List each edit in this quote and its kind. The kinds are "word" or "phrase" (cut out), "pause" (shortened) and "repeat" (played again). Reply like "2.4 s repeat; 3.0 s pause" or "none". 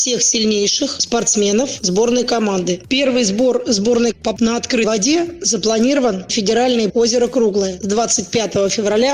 4.4 s word; 4.8 s word; 6.3 s word; 6.9 s word